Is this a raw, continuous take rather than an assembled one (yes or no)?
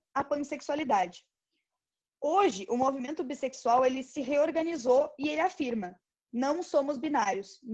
yes